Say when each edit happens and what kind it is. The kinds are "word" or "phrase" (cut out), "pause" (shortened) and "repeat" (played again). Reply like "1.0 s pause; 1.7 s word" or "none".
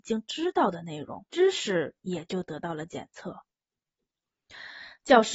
1.3 s pause; 2.0 s pause